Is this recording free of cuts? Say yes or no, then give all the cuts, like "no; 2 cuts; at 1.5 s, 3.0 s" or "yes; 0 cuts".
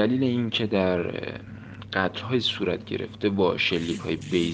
yes; 0 cuts